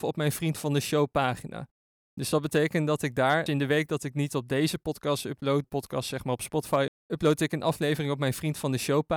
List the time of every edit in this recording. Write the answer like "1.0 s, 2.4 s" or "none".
3.5 s, 5.6 s, 6.9 s